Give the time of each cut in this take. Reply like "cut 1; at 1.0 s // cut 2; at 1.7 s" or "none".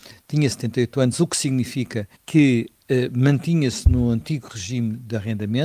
cut 1; at 2.2 s